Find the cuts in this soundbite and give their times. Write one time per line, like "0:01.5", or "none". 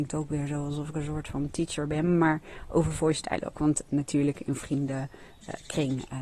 none